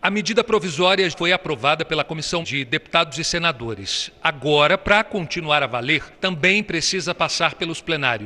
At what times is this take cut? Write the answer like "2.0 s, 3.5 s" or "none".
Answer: 1.1 s, 2.4 s, 6.1 s